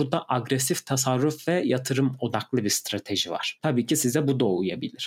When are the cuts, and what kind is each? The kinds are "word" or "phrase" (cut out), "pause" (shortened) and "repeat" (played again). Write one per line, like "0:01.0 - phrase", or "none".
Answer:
none